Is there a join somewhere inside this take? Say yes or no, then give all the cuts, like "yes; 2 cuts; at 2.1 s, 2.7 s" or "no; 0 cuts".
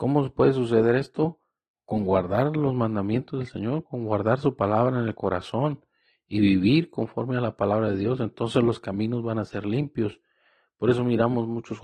no; 0 cuts